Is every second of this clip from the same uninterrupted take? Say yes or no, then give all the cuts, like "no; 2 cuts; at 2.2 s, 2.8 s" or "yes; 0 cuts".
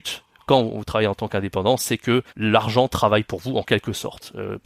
no; 1 cut; at 2.3 s